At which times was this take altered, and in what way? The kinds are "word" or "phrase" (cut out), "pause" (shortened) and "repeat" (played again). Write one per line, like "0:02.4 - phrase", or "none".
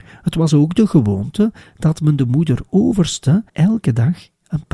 0:03.5 - pause